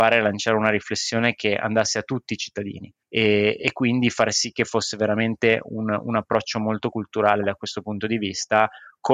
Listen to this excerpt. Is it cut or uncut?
cut